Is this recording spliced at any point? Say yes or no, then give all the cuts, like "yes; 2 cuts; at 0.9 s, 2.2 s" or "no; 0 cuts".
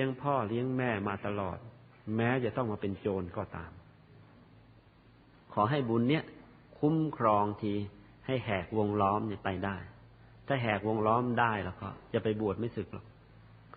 no; 0 cuts